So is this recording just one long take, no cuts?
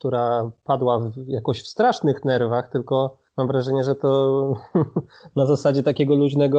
no; 1 cut; at 3.3 s

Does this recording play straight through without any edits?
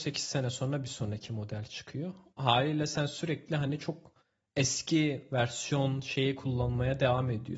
yes; 0 cuts

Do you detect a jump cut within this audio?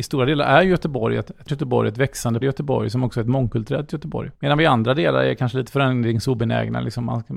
yes; 2 cuts; at 1.5 s, 2.4 s

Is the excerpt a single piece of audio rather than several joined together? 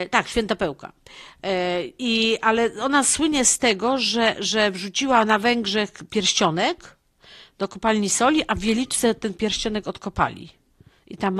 yes; 0 cuts

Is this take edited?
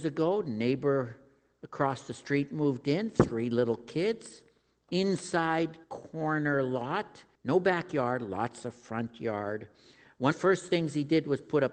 yes; 3 cuts; at 5.8 s, 7.3 s, 10.3 s

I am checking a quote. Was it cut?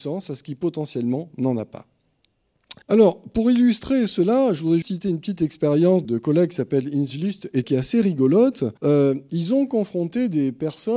yes; 5 cuts; at 2.8 s, 4.8 s, 6.0 s, 7.6 s, 8.8 s

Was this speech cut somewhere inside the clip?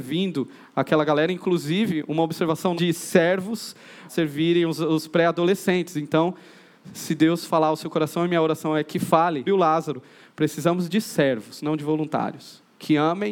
yes; 3 cuts; at 2.8 s, 4.1 s, 9.5 s

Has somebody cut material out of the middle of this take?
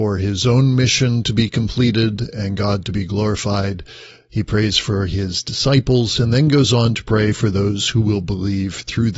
no; 0 cuts

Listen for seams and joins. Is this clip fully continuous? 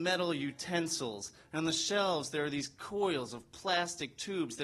yes; 0 cuts

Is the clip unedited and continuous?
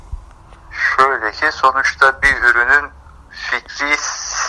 yes; 0 cuts

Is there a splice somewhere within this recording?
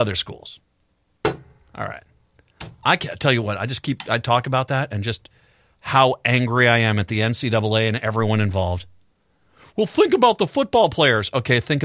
no; 0 cuts

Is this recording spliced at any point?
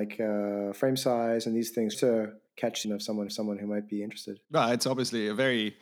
yes; 5 cuts; at 1.9 s, 2.5 s, 2.8 s, 3.3 s, 4.4 s

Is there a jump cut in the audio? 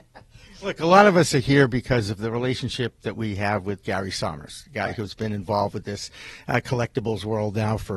no; 0 cuts

